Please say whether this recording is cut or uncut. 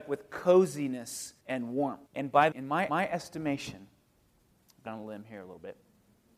cut